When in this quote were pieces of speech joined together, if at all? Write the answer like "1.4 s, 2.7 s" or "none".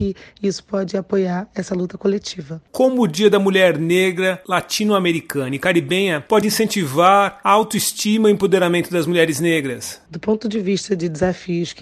none